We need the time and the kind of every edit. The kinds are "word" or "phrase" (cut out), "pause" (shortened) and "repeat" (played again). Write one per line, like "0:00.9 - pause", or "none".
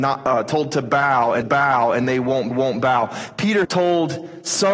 0:01.4 - repeat
0:02.5 - repeat
0:03.6 - phrase